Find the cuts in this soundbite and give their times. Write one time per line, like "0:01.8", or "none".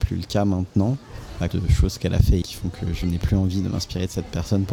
0:01.5
0:02.4